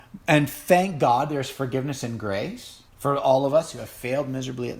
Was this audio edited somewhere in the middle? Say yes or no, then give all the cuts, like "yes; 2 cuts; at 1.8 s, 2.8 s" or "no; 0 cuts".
yes; 1 cut; at 2.9 s